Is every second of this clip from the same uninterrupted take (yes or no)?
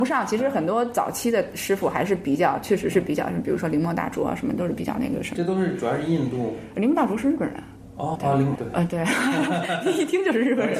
no